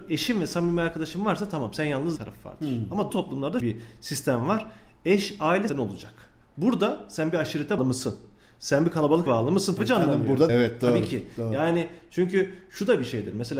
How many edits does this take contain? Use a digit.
8